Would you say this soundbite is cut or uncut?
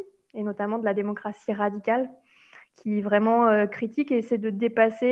uncut